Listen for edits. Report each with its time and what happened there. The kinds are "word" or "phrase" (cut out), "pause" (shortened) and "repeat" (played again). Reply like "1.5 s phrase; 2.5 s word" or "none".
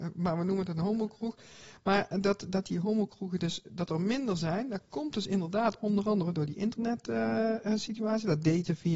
none